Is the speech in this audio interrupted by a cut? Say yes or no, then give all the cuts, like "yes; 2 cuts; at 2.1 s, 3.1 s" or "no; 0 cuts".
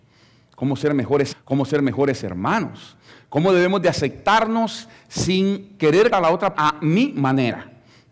yes; 3 cuts; at 1.3 s, 6.1 s, 6.5 s